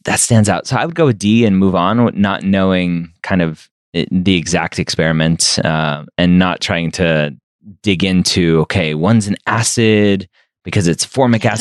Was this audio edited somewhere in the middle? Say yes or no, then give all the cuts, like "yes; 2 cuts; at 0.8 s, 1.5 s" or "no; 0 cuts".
no; 0 cuts